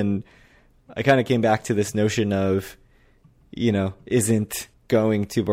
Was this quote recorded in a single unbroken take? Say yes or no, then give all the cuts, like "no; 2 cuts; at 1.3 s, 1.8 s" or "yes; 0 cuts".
yes; 0 cuts